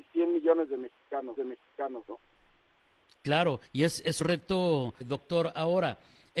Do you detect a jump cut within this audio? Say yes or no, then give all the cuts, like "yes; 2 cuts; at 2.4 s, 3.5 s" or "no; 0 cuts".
yes; 4 cuts; at 1.4 s, 3.6 s, 4.2 s, 5.0 s